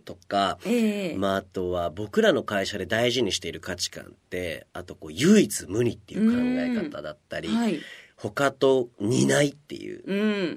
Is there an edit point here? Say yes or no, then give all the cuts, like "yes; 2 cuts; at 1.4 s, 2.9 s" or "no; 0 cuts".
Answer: no; 0 cuts